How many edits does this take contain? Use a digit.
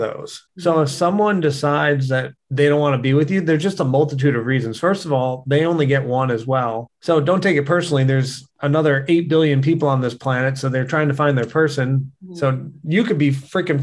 1